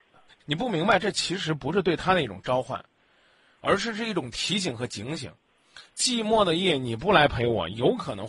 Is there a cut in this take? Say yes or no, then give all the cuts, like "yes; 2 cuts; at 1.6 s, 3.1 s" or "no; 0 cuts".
no; 0 cuts